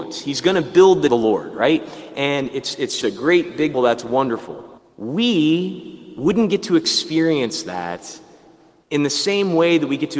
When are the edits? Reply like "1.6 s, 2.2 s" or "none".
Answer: 1.1 s, 3.0 s, 3.7 s, 4.8 s